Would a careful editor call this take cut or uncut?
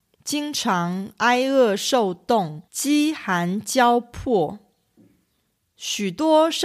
cut